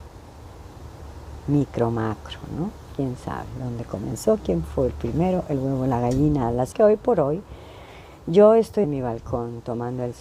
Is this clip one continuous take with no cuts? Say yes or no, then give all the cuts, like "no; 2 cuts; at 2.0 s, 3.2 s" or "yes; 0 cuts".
no; 2 cuts; at 6.7 s, 8.8 s